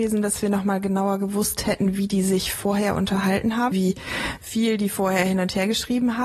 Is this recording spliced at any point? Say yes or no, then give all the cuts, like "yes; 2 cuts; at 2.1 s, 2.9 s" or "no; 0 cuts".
yes; 1 cut; at 3.7 s